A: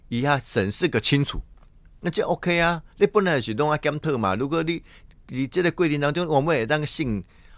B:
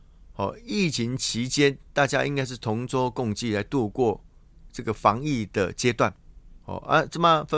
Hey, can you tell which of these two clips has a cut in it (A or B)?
B